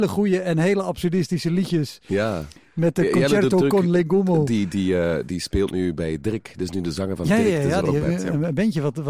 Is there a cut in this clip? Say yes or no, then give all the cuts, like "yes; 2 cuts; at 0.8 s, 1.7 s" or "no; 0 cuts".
no; 0 cuts